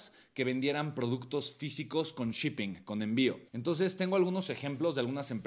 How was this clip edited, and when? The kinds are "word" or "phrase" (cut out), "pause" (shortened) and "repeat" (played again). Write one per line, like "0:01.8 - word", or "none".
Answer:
0:03.5 - pause